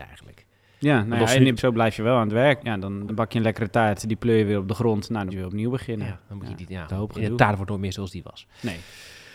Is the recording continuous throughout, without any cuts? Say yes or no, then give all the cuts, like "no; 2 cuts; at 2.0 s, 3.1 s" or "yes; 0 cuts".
no; 5 cuts; at 1.6 s, 2.6 s, 3.1 s, 5.3 s, 6.9 s